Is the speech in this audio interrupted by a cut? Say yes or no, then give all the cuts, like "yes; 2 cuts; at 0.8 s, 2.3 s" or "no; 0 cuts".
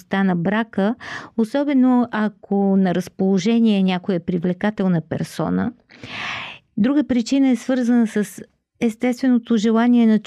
no; 0 cuts